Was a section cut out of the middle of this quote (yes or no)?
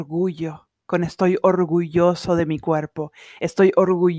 no